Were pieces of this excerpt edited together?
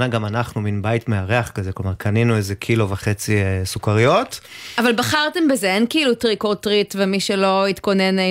no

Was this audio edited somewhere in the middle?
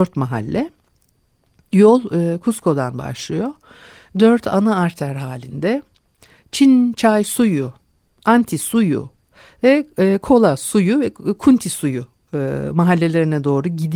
no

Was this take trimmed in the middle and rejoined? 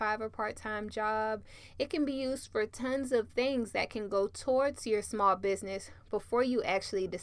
no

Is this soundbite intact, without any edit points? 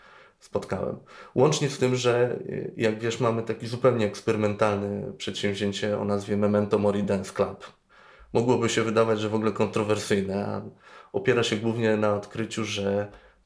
yes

